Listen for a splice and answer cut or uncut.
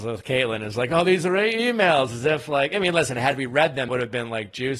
cut